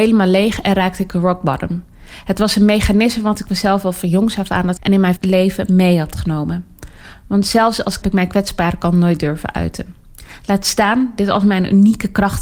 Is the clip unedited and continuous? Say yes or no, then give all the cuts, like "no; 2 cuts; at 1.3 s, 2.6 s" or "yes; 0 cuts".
no; 3 cuts; at 4.8 s, 5.2 s, 8.0 s